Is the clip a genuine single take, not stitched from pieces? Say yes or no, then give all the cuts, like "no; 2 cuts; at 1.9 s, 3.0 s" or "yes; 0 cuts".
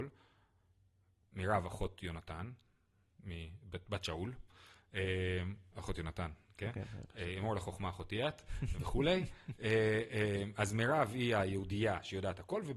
yes; 0 cuts